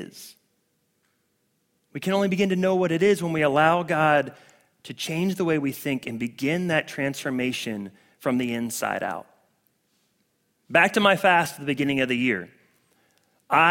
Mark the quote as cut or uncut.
uncut